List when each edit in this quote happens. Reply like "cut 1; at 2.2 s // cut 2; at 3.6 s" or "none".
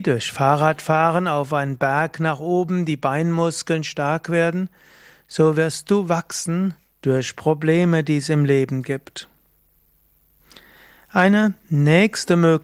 none

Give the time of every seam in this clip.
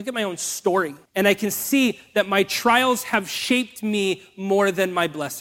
cut 1; at 1.1 s

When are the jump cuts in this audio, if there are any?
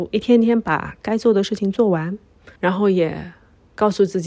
cut 1; at 1.0 s // cut 2; at 2.6 s

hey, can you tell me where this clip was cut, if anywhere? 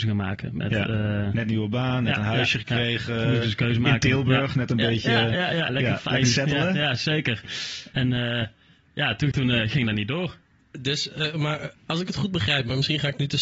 cut 1; at 5.7 s // cut 2; at 9.3 s // cut 3; at 11.8 s

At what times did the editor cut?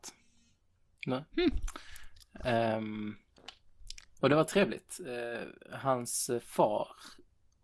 cut 1; at 5.6 s

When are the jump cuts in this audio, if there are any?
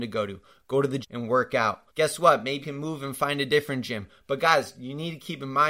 cut 1; at 1.0 s // cut 2; at 1.9 s // cut 3; at 2.6 s

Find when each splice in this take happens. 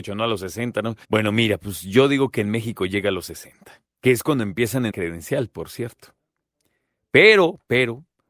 cut 1; at 1.0 s // cut 2; at 3.8 s // cut 3; at 4.9 s

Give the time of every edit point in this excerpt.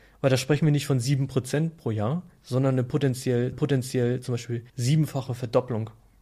cut 1; at 3.5 s // cut 2; at 4.7 s

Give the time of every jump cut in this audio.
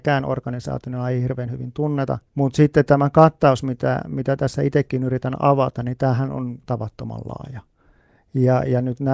cut 1; at 2.3 s

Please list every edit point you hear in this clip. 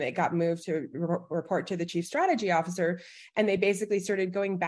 none

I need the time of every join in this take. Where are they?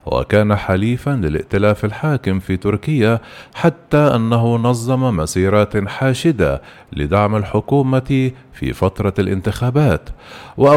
none

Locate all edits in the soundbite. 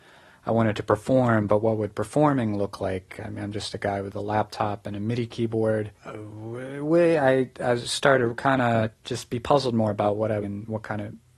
cut 1; at 6.0 s // cut 2; at 9.0 s // cut 3; at 10.4 s

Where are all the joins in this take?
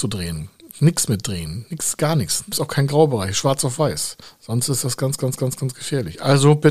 cut 1; at 2.5 s // cut 2; at 4.2 s // cut 3; at 5.4 s

